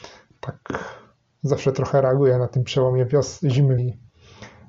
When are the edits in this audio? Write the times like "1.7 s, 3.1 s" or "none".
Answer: 3.8 s

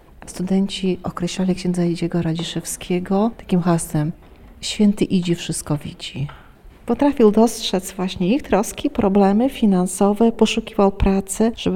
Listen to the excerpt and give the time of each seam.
none

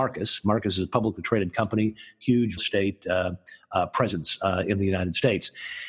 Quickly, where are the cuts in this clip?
2.6 s

